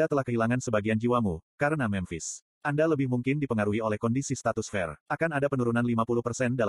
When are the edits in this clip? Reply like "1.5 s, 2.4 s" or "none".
2.5 s, 5.0 s